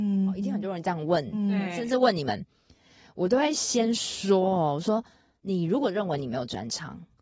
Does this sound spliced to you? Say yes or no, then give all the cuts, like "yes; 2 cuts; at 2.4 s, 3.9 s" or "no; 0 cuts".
no; 0 cuts